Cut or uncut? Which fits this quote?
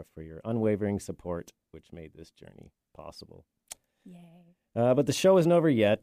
uncut